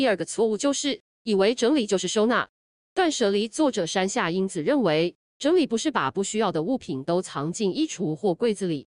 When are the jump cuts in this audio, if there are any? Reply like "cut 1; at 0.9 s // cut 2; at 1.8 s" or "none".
none